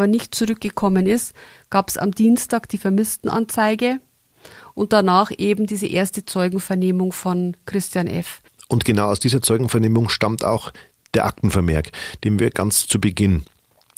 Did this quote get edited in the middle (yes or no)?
no